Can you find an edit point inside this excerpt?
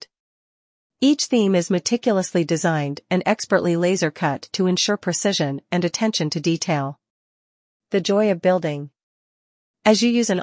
no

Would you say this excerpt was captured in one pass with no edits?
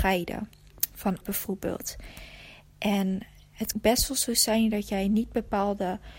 no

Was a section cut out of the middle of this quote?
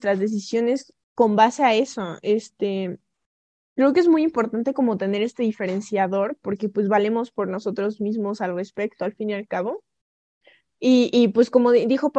no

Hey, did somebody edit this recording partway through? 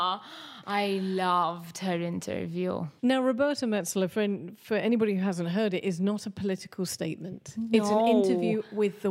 yes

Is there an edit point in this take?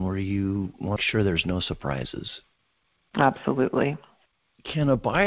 yes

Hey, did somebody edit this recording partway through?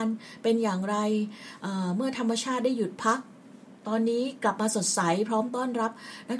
yes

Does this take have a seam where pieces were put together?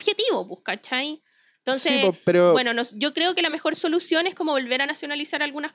no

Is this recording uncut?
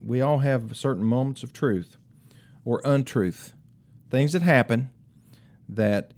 yes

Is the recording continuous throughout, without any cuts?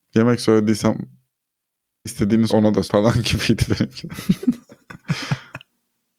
no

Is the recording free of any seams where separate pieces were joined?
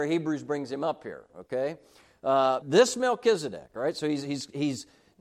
no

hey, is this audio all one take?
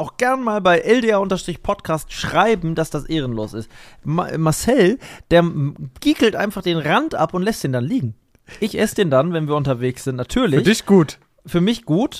yes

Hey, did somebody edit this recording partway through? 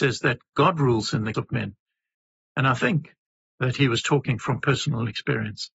yes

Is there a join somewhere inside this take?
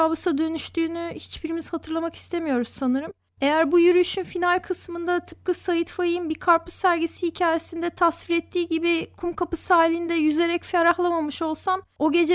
no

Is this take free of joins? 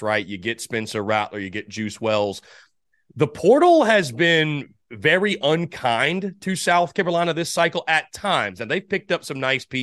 yes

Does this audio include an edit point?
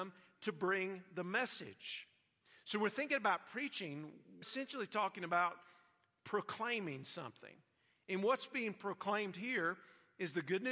yes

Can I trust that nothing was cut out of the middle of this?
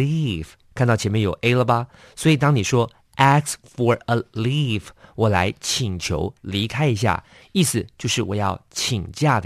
yes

